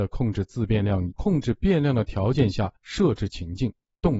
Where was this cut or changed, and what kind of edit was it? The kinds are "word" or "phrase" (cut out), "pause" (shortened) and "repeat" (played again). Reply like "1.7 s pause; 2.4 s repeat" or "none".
1.1 s phrase; 2.8 s pause